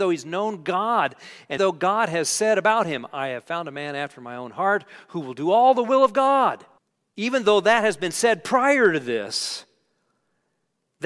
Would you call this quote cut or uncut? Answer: cut